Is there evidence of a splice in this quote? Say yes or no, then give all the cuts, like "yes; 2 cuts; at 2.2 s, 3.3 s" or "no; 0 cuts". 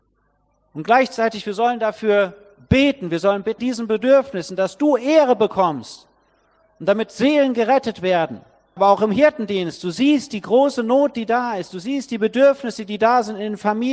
yes; 2 cuts; at 3.6 s, 8.8 s